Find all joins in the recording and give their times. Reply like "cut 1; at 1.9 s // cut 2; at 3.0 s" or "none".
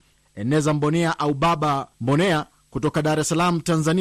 cut 1; at 1.9 s